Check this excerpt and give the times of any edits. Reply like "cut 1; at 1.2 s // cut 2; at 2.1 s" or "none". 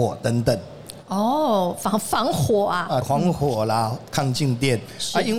cut 1; at 3.0 s